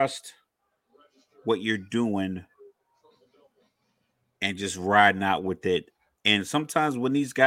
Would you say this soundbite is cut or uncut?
uncut